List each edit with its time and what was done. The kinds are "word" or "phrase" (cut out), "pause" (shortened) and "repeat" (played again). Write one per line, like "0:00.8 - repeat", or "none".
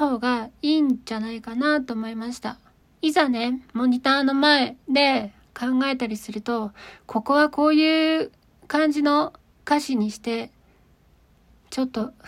0:02.8 - pause
0:03.7 - pause
0:04.8 - pause